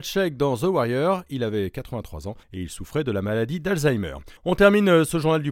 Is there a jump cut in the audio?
yes; 2 cuts; at 2.4 s, 4.4 s

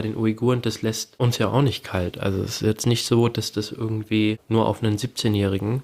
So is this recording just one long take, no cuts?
yes; 0 cuts

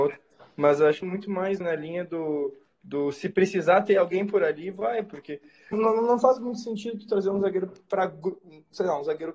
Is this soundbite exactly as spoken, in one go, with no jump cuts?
no; 4 cuts; at 1.0 s, 1.6 s, 2.7 s, 5.7 s

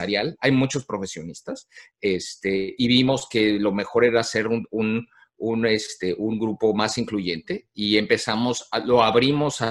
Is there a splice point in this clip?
no; 0 cuts

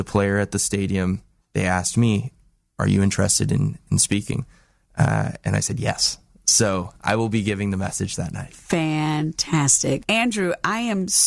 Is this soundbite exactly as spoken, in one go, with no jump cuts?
yes; 0 cuts

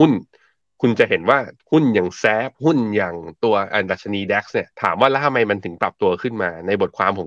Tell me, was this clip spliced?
yes; 3 cuts; at 1.6 s, 2.5 s, 4.7 s

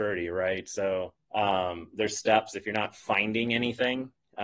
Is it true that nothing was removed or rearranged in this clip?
no; 1 cut; at 1.2 s

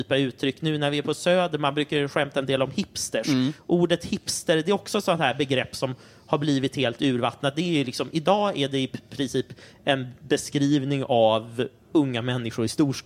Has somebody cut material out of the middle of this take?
no; 0 cuts

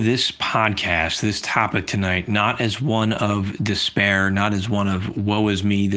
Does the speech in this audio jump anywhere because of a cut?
no; 0 cuts

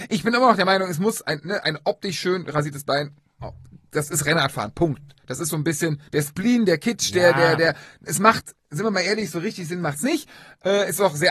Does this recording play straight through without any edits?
no; 1 cut; at 6.1 s

